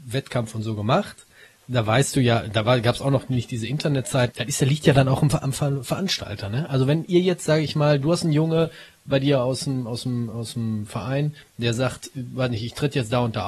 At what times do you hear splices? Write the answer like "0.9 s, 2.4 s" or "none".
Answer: 4.3 s